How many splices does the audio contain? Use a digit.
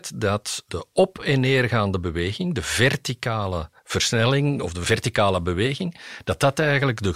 1